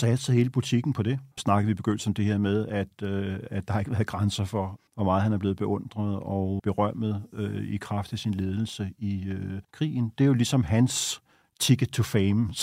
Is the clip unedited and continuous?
no; 3 cuts; at 1.3 s, 4.9 s, 9.6 s

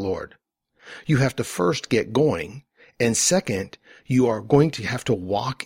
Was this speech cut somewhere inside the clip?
no; 0 cuts

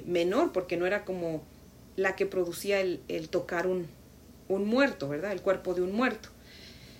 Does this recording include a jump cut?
no; 0 cuts

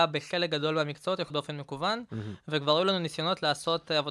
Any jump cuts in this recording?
yes; 1 cut; at 1.3 s

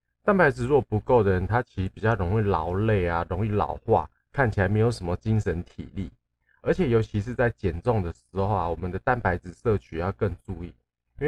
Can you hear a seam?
no; 0 cuts

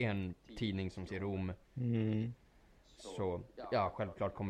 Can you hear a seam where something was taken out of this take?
yes; 2 cuts; at 1.1 s, 1.6 s

